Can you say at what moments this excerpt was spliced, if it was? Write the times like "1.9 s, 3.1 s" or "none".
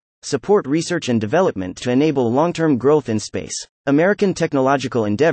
3.2 s, 3.7 s